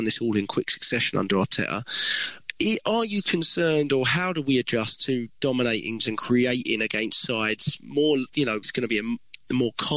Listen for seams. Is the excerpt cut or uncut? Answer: cut